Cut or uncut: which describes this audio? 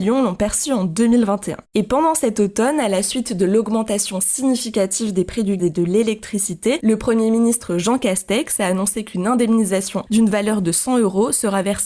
cut